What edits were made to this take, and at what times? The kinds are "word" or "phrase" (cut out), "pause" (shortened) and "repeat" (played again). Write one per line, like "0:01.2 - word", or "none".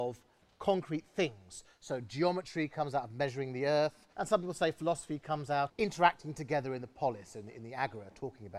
0:04.1 - pause
0:05.7 - phrase